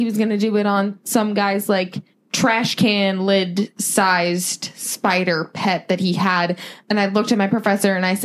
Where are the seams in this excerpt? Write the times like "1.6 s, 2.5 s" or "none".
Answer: 2.1 s